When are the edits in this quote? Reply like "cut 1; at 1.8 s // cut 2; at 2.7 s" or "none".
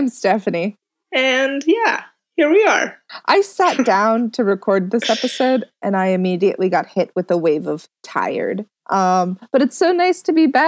none